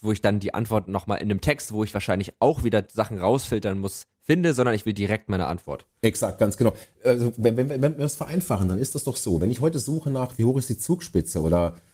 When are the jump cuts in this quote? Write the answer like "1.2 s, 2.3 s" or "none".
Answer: none